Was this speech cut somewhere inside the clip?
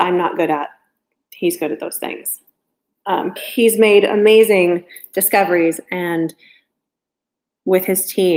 yes; 1 cut; at 3.4 s

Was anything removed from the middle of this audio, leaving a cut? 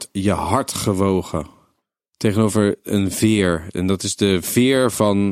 no; 0 cuts

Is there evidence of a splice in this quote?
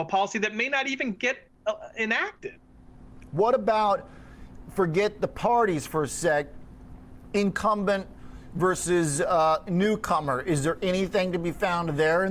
no; 0 cuts

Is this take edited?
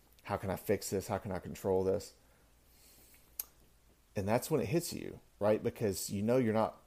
yes; 2 cuts; at 3.9 s, 5.3 s

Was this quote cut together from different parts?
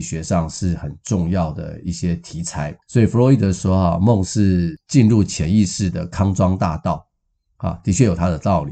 yes; 1 cut; at 2.8 s

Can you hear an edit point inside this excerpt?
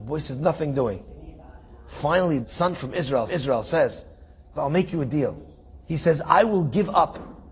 yes; 4 cuts; at 2.4 s, 3.3 s, 4.6 s, 5.8 s

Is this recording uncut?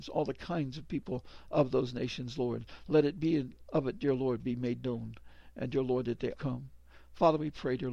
no; 2 cuts; at 3.6 s, 6.3 s

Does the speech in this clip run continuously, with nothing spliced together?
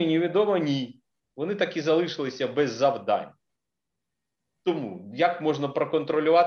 yes; 0 cuts

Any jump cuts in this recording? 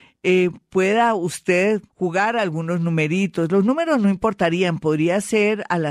yes; 1 cut; at 1.9 s

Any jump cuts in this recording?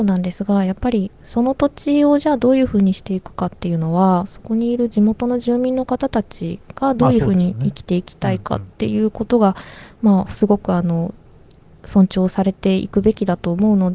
yes; 1 cut; at 8.7 s

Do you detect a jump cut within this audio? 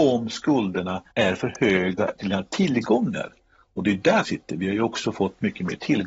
yes; 3 cuts; at 1.1 s, 2.2 s, 4.2 s

